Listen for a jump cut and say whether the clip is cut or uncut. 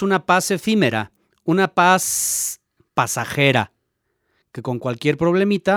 uncut